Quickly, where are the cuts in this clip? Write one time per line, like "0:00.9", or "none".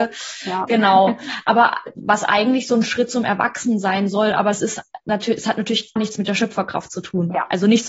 0:06.0